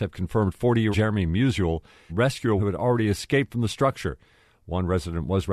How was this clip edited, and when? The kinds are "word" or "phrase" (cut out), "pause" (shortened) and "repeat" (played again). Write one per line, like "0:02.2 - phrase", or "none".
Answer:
0:00.9 - word
0:02.1 - phrase
0:02.6 - word